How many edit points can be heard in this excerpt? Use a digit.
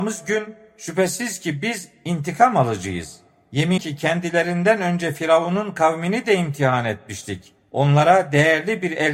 1